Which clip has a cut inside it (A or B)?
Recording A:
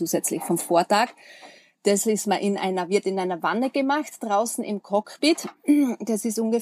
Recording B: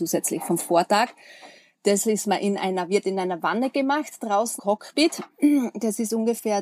B